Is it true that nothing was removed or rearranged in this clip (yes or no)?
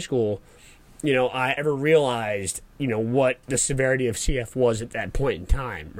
no